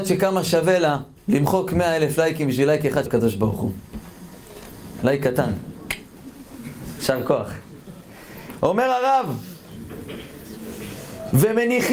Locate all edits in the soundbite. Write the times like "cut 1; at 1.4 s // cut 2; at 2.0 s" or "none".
cut 1; at 1.2 s // cut 2; at 3.1 s